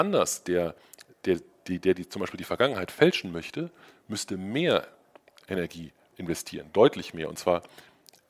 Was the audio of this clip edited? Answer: no; 0 cuts

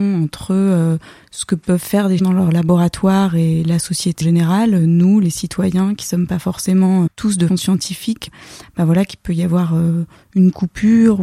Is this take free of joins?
no; 5 cuts; at 2.2 s, 4.2 s, 7.1 s, 7.5 s, 8.3 s

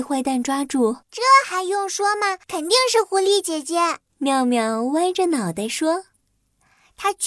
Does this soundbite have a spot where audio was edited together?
yes; 3 cuts; at 1.0 s, 2.4 s, 4.1 s

